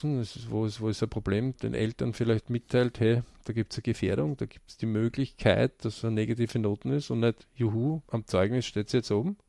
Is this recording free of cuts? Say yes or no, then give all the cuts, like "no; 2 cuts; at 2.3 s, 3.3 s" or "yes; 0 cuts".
no; 2 cuts; at 1.5 s, 8.0 s